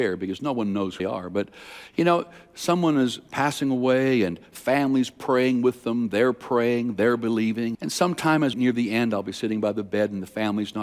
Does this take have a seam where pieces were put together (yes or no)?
yes